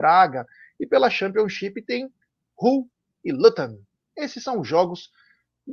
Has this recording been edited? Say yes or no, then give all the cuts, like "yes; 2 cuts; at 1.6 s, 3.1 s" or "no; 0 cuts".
no; 0 cuts